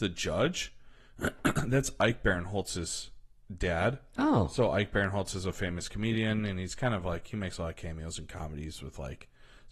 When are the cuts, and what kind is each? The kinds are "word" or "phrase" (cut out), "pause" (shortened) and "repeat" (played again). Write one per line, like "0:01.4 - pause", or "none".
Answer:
none